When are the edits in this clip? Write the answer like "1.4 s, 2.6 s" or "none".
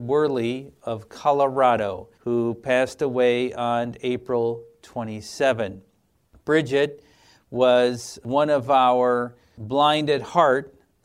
2.1 s